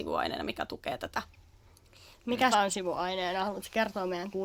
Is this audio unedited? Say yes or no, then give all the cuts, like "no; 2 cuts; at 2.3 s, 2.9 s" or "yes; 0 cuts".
no; 1 cut; at 2.5 s